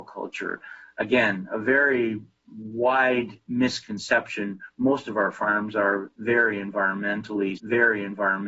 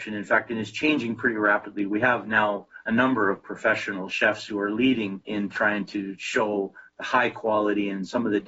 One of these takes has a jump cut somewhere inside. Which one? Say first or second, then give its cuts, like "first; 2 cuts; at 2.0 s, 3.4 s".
first; 1 cut; at 7.6 s